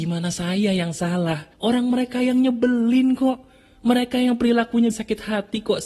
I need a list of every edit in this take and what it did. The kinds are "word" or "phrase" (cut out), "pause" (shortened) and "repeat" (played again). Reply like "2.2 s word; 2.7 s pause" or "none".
1.5 s pause; 4.9 s phrase